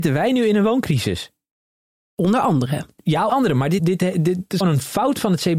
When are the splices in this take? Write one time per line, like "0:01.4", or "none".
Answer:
0:03.3
0:03.8
0:04.6